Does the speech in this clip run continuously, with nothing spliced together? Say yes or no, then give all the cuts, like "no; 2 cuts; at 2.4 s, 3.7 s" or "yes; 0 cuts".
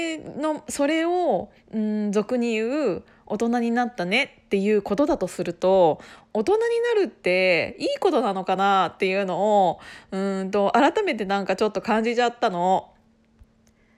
no; 1 cut; at 1.6 s